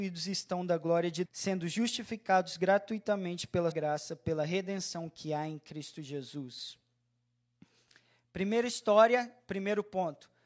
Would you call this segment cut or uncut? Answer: cut